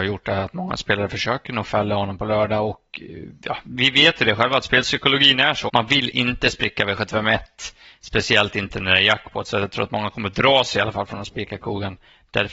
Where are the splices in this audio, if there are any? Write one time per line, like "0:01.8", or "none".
0:05.7